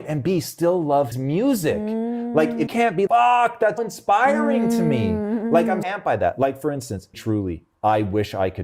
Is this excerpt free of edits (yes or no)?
no